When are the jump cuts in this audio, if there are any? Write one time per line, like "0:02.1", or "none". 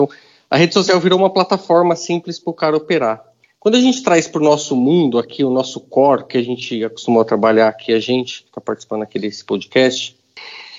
none